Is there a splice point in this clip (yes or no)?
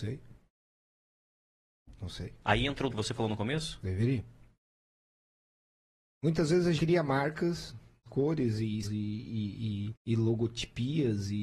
yes